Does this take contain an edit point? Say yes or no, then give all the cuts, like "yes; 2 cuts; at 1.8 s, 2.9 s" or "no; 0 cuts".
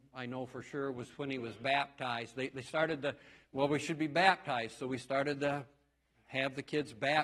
no; 0 cuts